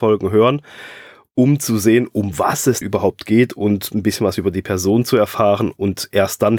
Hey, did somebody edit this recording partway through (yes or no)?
yes